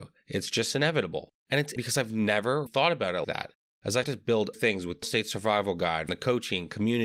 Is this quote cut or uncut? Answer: cut